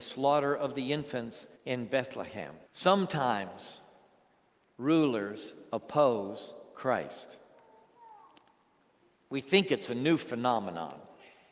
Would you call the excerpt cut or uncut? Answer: cut